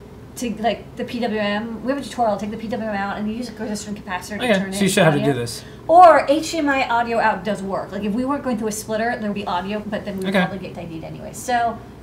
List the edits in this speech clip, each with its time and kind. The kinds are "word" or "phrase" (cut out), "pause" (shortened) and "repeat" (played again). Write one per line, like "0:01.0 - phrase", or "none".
0:01.0 - word
0:09.3 - word
0:09.8 - word
0:10.7 - word